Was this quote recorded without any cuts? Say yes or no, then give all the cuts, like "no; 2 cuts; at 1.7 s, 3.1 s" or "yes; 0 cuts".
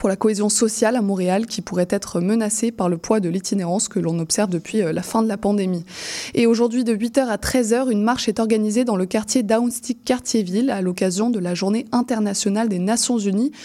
yes; 0 cuts